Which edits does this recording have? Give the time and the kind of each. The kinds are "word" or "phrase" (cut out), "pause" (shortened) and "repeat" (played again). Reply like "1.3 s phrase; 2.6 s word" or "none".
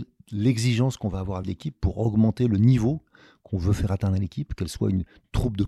1.4 s word